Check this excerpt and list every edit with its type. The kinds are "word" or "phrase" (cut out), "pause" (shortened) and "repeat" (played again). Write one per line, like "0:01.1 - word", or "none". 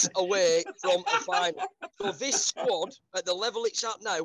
0:01.9 - pause